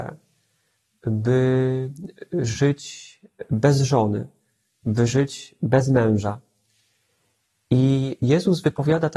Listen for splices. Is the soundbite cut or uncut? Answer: uncut